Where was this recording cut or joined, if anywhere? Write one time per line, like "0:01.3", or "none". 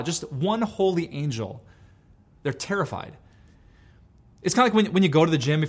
none